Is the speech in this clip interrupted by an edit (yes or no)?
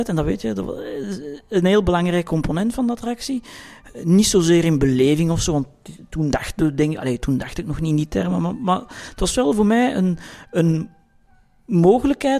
no